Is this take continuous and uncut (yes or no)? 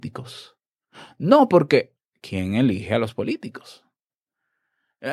yes